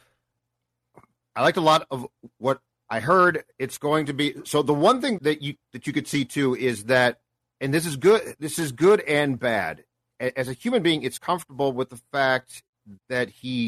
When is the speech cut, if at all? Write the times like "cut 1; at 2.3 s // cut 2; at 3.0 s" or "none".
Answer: cut 1; at 2.7 s // cut 2; at 5.2 s // cut 3; at 11.2 s